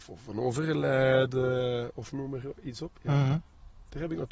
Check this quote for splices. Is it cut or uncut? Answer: uncut